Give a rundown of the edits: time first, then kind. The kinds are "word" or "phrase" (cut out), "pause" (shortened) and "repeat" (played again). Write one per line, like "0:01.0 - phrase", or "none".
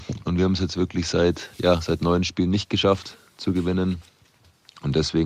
none